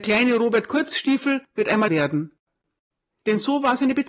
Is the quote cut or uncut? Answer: cut